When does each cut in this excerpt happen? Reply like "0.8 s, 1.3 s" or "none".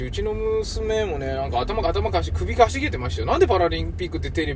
1.8 s

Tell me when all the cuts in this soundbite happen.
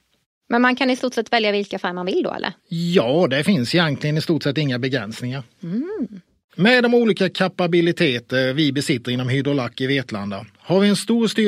2.6 s, 6.4 s

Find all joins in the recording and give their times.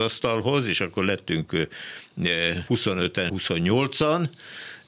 2.7 s, 3.3 s

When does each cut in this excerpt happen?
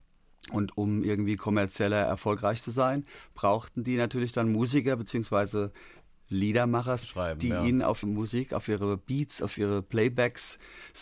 7.0 s, 8.0 s

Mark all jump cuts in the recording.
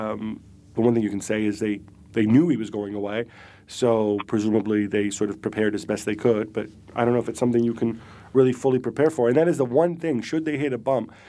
none

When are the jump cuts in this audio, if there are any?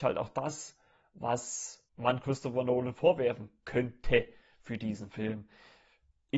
1.9 s

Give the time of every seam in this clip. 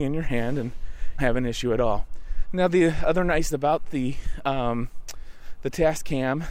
1.2 s, 3.5 s

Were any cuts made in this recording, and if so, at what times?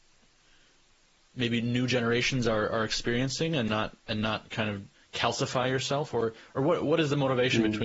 4.0 s, 4.9 s

